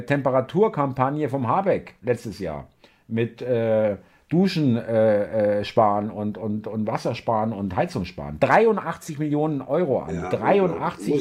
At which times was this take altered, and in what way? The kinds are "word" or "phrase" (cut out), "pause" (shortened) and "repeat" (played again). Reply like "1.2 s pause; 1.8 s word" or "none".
none